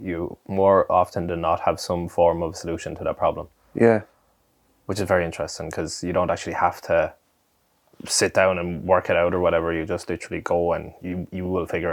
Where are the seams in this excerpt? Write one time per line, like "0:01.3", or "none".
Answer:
none